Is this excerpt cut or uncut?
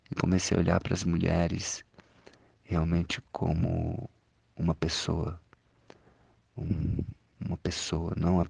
uncut